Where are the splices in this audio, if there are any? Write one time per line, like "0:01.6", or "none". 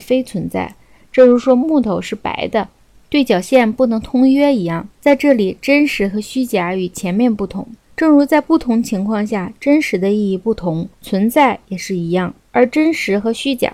0:04.9
0:07.8
0:10.9
0:12.4